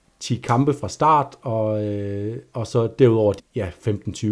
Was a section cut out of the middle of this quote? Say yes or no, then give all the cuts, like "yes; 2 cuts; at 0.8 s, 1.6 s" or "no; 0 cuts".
yes; 1 cut; at 3.4 s